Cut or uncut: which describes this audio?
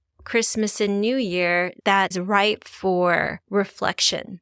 cut